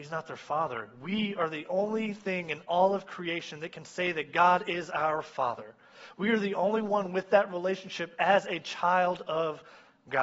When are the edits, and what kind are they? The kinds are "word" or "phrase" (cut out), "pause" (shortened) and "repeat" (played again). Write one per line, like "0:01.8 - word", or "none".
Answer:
none

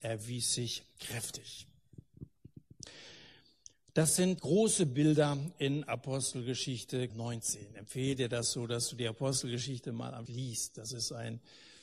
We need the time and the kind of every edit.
0:04.4 - word
0:07.1 - word
0:10.3 - word

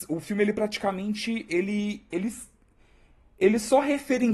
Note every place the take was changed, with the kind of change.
none

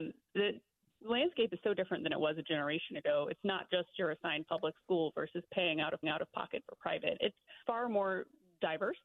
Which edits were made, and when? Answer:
0:06.0 - repeat
0:07.6 - pause

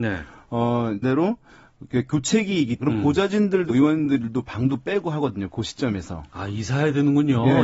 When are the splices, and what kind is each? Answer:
0:01.0 - phrase
0:02.8 - word
0:03.7 - word

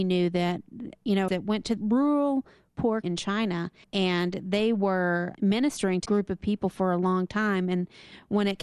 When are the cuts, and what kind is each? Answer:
0:01.3 - phrase
0:01.8 - word
0:03.0 - word
0:03.8 - pause
0:05.3 - word
0:06.1 - word

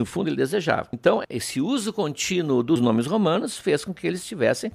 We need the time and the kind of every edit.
none

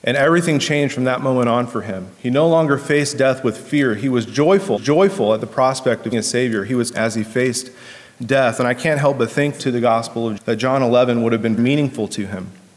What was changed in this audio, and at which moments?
0:02.1 - pause
0:04.8 - repeat
0:06.1 - word
0:06.9 - word
0:09.6 - phrase
0:10.4 - word
0:11.6 - word

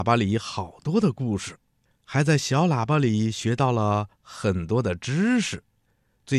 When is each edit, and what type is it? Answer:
none

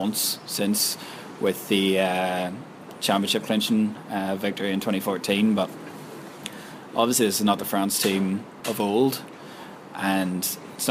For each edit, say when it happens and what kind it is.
none

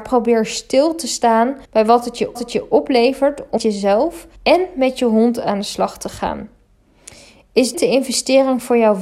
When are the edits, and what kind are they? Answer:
0:01.6 - pause
0:02.3 - repeat
0:03.6 - word
0:04.4 - pause
0:07.7 - word

